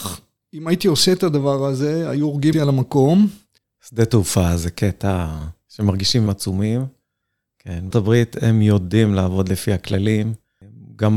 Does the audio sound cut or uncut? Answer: cut